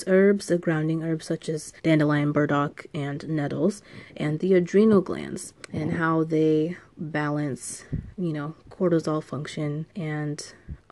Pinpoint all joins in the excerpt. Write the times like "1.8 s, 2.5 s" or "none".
1.8 s, 5.6 s, 9.9 s